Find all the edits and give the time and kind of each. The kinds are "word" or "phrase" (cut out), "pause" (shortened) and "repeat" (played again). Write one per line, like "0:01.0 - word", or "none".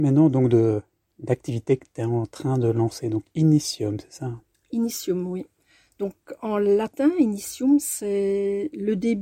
none